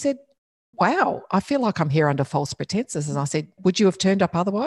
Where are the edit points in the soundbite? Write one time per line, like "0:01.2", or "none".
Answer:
0:03.6